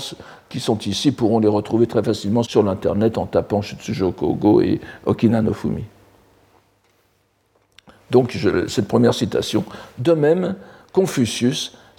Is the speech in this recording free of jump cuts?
no; 1 cut; at 2.4 s

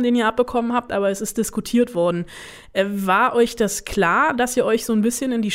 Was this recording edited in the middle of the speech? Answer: no; 0 cuts

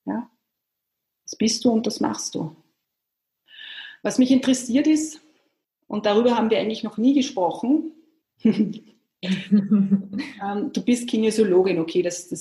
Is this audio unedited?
yes; 0 cuts

